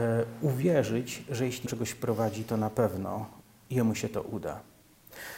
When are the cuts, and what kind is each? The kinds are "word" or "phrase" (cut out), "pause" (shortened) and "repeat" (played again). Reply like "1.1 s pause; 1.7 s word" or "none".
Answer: 1.7 s phrase; 3.4 s pause